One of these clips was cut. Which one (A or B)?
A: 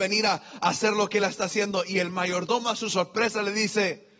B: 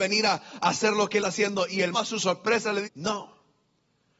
B